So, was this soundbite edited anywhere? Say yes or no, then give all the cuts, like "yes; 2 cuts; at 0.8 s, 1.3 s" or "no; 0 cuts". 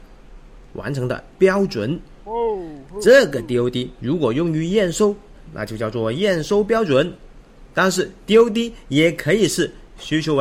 no; 0 cuts